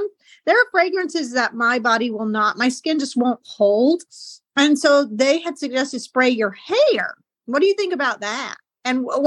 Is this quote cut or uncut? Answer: uncut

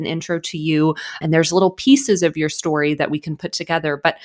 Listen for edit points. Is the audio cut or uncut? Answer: cut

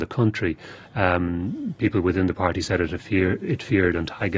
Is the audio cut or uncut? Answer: uncut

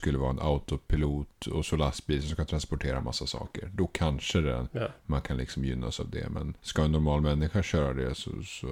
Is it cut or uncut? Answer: cut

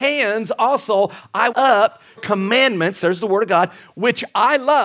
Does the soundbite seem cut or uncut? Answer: cut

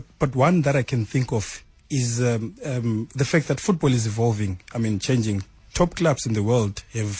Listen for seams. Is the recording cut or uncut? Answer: uncut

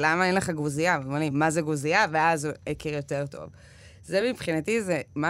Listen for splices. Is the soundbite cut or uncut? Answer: uncut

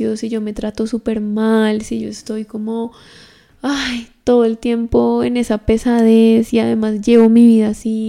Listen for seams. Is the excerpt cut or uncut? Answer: uncut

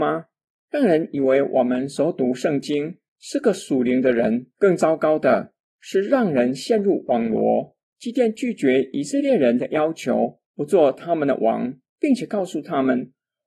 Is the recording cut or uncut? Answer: cut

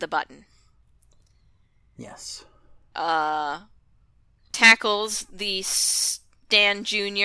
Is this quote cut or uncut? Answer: cut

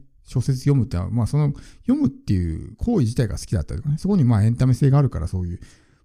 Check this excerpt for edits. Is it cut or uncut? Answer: uncut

